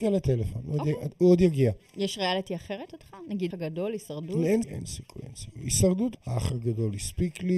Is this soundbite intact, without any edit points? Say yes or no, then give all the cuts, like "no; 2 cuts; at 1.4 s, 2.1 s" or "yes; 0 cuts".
no; 5 cuts; at 1.9 s, 2.9 s, 3.5 s, 4.6 s, 6.1 s